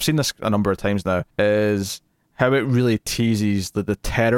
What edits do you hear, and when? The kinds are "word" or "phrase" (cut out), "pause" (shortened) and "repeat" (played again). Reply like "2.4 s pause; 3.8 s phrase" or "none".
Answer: 1.3 s pause